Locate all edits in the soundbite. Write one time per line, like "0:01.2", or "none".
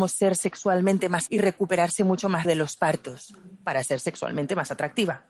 0:01.3
0:02.4